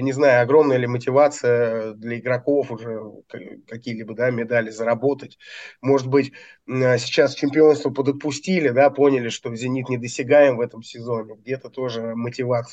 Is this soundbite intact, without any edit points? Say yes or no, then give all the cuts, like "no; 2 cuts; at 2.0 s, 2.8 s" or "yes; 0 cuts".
yes; 0 cuts